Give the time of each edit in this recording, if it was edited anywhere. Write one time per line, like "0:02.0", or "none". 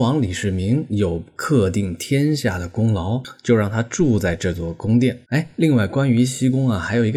0:05.2

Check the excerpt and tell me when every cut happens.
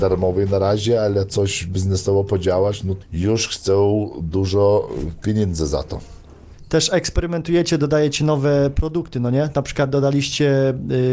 0:03.0

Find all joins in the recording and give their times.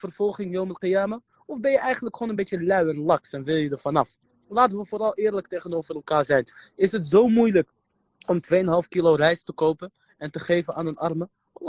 none

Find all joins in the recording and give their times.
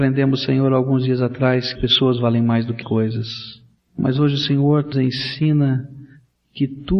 0:01.8
0:02.8
0:04.9

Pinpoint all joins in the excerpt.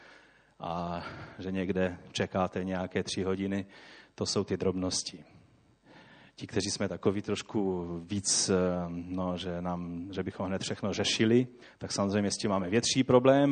0:11.6

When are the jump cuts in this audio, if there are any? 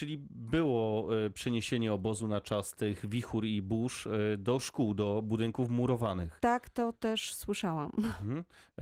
none

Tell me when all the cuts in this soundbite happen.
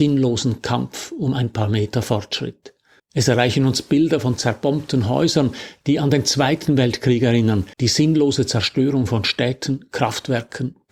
0:03.0
0:07.7

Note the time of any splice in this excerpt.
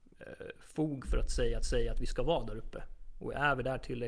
0:01.6

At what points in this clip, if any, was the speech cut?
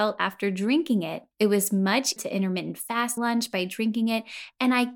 0:01.3
0:02.2
0:03.2

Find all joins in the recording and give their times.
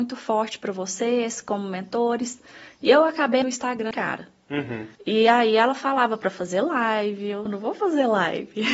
0:03.4
0:03.9
0:05.0
0:07.5

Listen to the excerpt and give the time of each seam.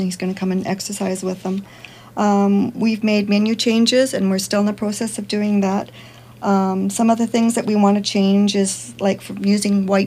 none

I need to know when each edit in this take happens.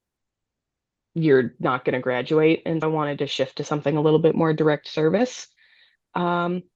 0:02.8

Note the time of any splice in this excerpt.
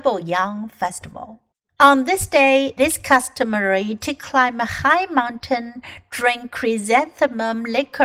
0:02.8

